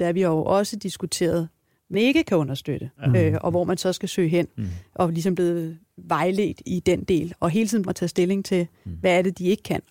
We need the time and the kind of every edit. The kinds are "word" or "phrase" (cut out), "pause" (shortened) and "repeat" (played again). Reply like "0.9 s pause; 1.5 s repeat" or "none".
1.9 s word; 3.0 s pause; 6.6 s word; 7.8 s phrase